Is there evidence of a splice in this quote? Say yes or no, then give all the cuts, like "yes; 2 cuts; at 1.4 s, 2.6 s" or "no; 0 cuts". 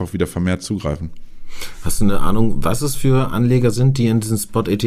no; 0 cuts